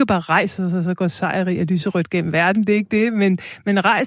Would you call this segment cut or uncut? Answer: uncut